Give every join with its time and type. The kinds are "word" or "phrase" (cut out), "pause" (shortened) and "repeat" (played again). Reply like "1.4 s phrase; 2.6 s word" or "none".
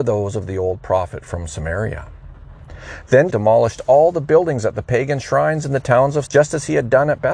3.3 s word; 6.3 s word